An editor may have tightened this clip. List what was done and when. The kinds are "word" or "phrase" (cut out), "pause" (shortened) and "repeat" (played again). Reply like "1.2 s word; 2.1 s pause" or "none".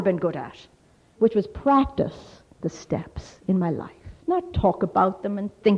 4.2 s pause